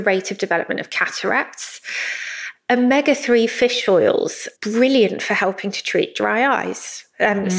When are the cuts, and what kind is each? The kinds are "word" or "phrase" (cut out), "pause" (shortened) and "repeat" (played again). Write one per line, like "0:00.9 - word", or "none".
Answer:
0:04.6 - pause